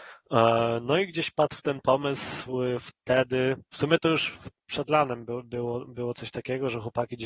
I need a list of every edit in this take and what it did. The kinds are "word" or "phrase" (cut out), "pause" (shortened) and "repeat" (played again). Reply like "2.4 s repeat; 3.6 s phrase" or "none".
3.7 s pause